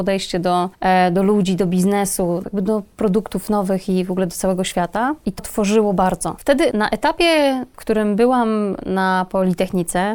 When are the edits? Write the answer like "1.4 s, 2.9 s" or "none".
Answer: 2.4 s, 5.4 s, 6.7 s